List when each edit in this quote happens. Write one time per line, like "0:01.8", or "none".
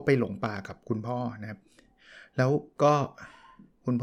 none